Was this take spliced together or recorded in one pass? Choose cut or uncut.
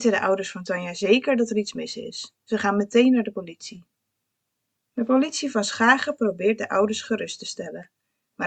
uncut